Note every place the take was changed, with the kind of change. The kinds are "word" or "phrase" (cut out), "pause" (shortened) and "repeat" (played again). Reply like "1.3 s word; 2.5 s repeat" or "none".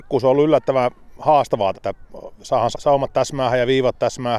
1.7 s word; 2.7 s word

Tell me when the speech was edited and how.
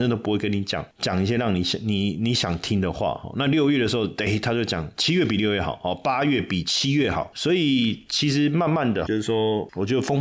9.1 s word

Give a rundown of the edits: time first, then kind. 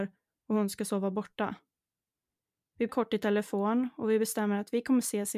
2.9 s word

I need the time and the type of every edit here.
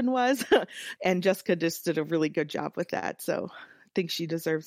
1.0 s word

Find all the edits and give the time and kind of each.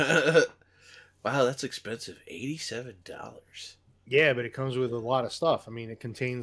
none

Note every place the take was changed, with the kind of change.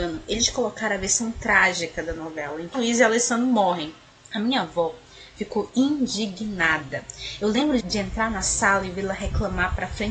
2.7 s word; 7.8 s word

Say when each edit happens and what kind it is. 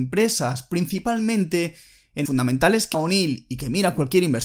2.2 s word; 2.9 s word

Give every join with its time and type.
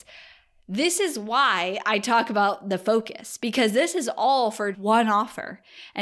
4.7 s word

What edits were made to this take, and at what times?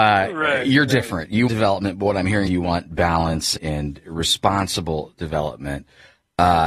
1.5 s word; 2.5 s word; 3.6 s word

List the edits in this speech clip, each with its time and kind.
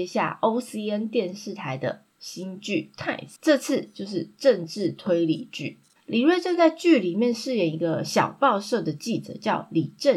3.4 s pause; 6.0 s pause

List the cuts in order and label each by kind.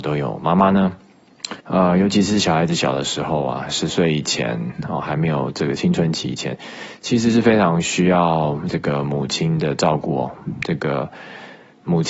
1.6 s pause

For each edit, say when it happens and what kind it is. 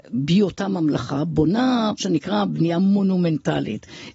2.0 s word

